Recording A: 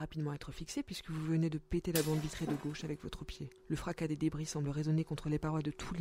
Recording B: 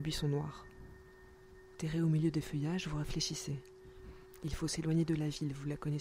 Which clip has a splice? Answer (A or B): A